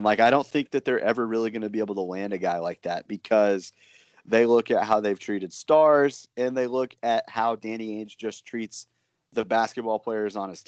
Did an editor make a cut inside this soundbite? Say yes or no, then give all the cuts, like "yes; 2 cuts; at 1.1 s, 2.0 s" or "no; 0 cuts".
no; 0 cuts